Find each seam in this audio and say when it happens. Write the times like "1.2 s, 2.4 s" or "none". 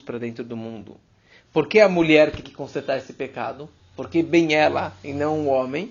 2.4 s